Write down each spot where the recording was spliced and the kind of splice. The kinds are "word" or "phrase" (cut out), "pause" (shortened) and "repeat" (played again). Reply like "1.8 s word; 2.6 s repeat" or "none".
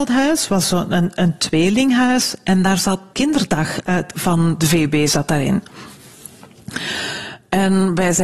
3.1 s word; 4.1 s word